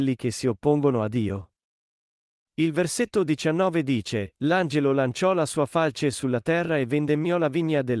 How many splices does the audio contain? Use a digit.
0